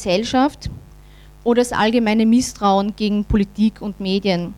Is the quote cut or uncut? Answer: uncut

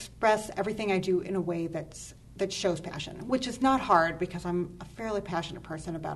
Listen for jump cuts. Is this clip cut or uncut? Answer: uncut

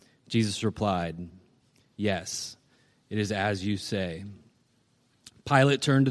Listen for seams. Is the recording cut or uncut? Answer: uncut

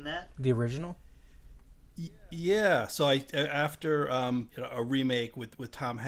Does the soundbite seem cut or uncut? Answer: cut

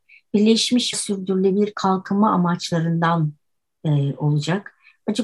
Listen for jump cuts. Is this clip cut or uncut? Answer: cut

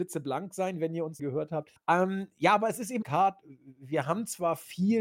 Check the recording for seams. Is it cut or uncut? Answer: cut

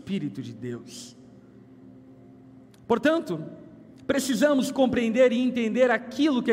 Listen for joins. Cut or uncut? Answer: uncut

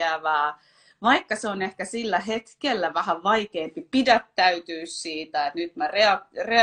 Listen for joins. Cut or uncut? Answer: uncut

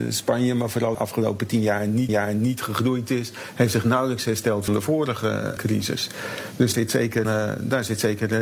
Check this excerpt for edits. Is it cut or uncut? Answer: cut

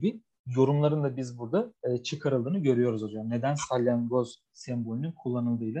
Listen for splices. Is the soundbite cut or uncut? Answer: cut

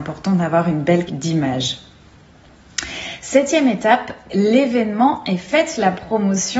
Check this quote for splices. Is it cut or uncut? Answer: cut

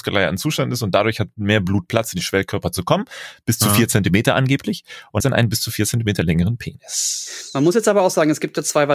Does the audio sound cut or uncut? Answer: cut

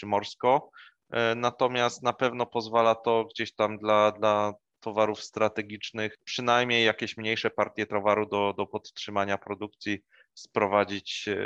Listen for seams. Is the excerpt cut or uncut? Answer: uncut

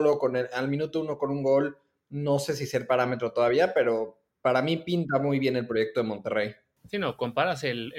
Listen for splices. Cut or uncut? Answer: uncut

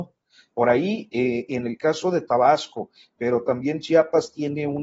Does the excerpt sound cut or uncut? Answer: uncut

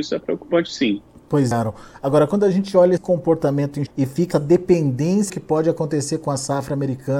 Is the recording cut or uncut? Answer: cut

